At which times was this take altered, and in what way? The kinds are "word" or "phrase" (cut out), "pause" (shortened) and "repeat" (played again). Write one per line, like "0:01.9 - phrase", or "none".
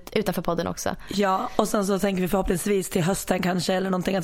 none